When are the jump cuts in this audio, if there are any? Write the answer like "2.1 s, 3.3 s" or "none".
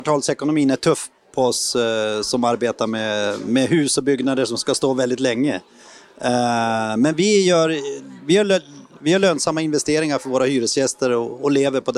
none